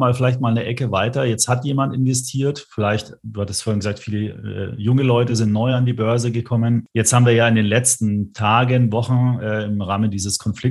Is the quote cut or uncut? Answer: uncut